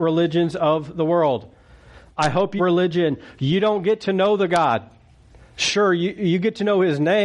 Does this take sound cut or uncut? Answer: cut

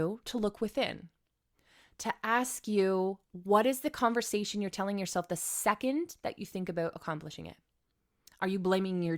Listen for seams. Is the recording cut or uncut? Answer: cut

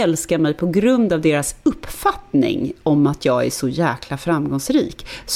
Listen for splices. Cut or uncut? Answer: uncut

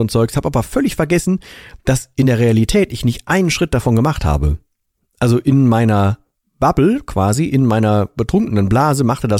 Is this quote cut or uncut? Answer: uncut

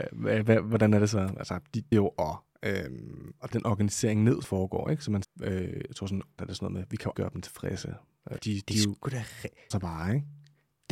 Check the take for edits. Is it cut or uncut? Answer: cut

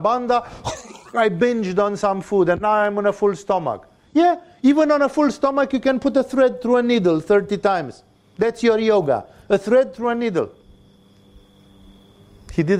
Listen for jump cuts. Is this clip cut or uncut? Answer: uncut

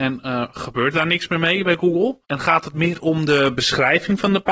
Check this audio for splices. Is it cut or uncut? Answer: cut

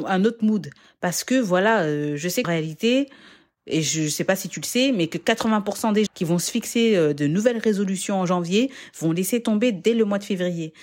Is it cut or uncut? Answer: cut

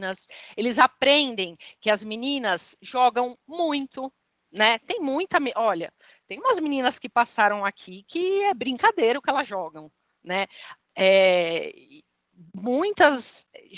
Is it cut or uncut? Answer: uncut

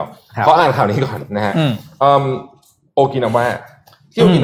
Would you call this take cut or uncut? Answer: uncut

